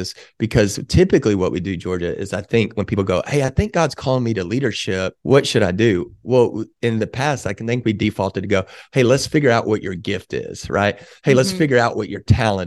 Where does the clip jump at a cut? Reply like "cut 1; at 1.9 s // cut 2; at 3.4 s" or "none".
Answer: cut 1; at 5.2 s